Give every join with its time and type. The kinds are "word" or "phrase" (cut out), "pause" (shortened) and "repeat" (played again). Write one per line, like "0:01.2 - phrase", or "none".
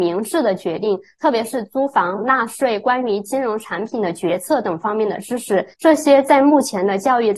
0:02.2 - phrase
0:05.7 - pause